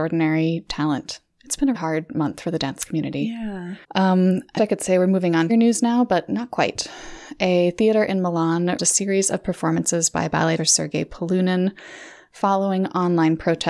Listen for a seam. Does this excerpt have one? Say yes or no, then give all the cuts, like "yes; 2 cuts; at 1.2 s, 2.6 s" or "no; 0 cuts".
yes; 6 cuts; at 1.7 s, 3.8 s, 4.6 s, 5.5 s, 8.8 s, 10.6 s